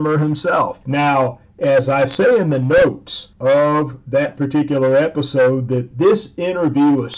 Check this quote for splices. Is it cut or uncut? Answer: uncut